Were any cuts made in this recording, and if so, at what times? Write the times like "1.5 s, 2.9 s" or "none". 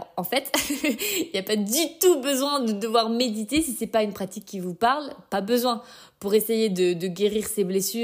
none